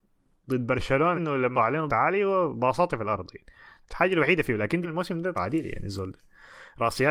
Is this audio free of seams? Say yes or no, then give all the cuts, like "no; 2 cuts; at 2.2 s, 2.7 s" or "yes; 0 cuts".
no; 6 cuts; at 1.1 s, 1.5 s, 1.9 s, 2.9 s, 4.8 s, 5.3 s